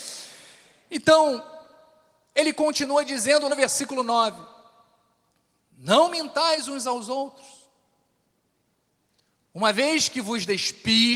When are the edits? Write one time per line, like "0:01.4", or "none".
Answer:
0:03.5